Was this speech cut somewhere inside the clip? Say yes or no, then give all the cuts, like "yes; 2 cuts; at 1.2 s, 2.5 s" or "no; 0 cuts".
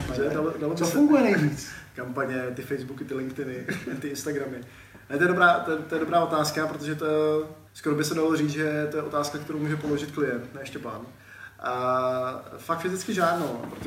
yes; 1 cut; at 7.7 s